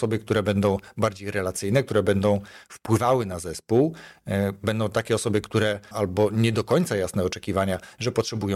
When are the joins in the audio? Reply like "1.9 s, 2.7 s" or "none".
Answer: 5.9 s